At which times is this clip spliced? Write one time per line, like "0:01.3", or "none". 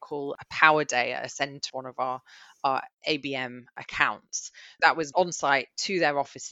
0:01.7
0:04.8
0:05.1